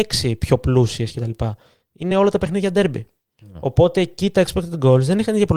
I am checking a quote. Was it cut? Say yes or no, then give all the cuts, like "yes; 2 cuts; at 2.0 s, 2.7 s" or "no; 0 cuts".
no; 0 cuts